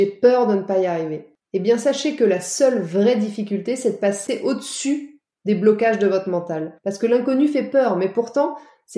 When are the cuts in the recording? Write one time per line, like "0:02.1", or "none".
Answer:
0:01.4
0:06.8